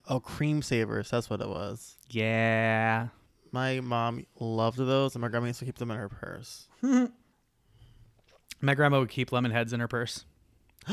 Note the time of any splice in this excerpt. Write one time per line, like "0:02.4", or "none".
none